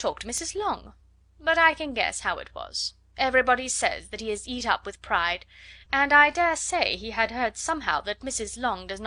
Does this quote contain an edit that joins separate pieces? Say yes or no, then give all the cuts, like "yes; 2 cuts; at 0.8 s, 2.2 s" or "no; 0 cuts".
no; 0 cuts